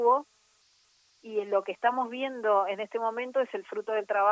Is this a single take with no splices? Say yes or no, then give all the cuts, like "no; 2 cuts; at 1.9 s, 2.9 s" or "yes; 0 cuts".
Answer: yes; 0 cuts